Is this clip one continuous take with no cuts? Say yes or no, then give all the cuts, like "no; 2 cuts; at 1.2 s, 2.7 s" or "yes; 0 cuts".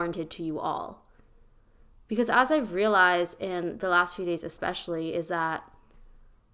yes; 0 cuts